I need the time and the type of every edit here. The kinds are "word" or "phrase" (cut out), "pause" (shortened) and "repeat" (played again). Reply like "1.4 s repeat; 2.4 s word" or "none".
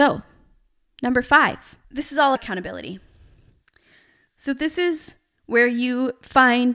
1.8 s pause; 2.4 s word